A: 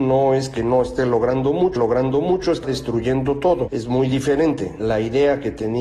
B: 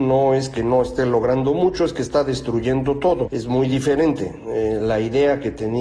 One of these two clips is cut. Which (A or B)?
A